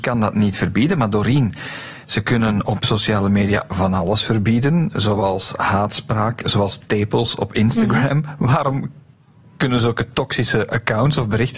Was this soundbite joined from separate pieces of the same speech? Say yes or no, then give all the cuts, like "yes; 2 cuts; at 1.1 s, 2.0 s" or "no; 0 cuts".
no; 0 cuts